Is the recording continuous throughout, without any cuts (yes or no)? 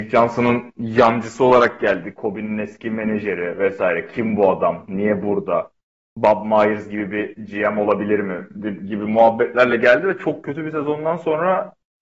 yes